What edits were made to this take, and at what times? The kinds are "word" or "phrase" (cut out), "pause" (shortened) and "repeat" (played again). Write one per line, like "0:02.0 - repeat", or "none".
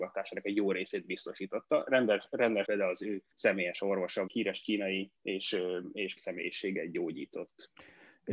0:02.6 - word
0:03.3 - pause
0:04.3 - phrase
0:05.2 - pause
0:06.2 - word

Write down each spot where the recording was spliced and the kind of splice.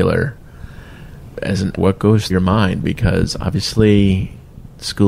0:01.3 - word
0:01.8 - word
0:02.3 - word

